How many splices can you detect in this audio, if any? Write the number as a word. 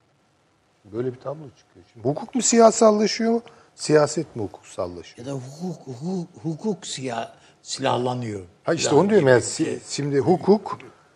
zero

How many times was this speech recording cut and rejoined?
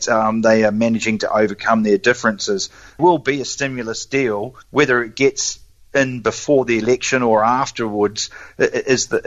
two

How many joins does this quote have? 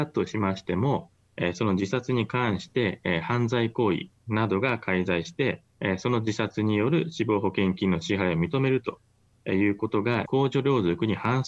two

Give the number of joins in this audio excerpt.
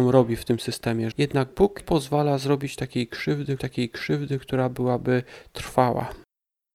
three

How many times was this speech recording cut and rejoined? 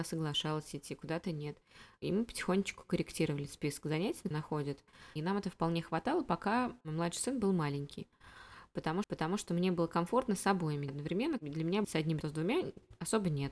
six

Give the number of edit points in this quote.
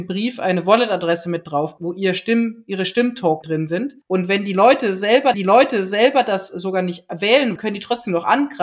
five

